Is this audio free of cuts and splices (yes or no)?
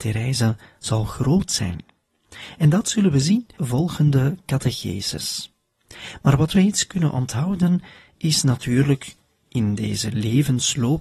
no